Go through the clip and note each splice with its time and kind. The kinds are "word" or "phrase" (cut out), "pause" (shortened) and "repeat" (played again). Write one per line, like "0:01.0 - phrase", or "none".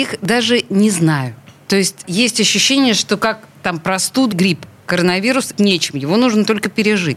0:02.0 - word
0:04.3 - word
0:05.5 - word

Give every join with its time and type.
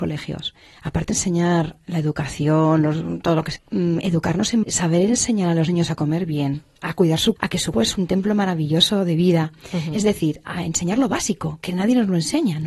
0:01.1 - word
0:03.6 - word
0:04.6 - word
0:07.4 - word
0:07.7 - word
0:10.4 - word

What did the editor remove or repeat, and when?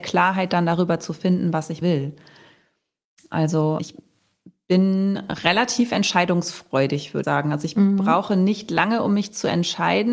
0:01.8 - word
0:03.8 - word
0:07.2 - word

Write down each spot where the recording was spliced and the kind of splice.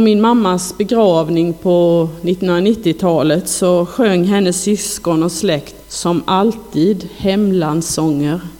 0:05.8 - pause

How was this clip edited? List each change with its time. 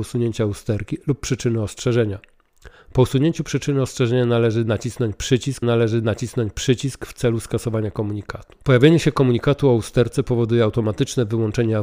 0:05.6 - repeat
0:08.6 - pause

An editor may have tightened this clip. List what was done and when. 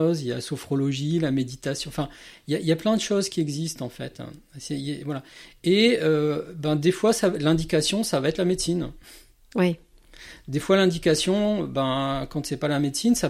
none

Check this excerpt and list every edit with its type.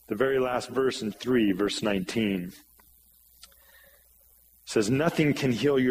0:01.1 - word

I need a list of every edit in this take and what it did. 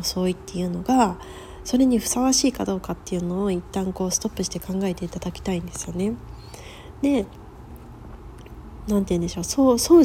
none

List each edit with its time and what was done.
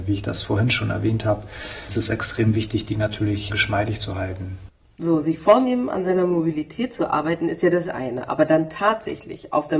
0:03.5 - word

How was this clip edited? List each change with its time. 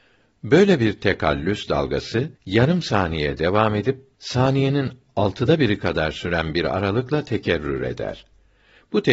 0:02.4 - pause
0:04.1 - pause

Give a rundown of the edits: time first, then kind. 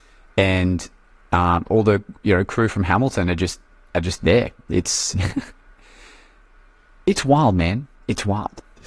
none

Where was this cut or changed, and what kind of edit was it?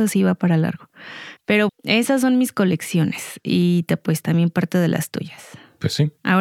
0:01.7 - word

